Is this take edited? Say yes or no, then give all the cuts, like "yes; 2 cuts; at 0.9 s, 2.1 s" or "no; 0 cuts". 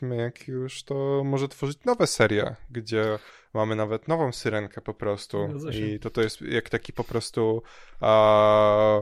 no; 0 cuts